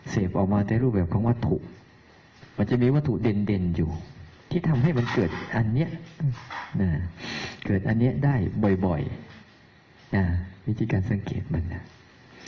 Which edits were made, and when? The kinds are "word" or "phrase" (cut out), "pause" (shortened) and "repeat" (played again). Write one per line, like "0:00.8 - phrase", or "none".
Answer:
0:04.4 - pause
0:09.4 - pause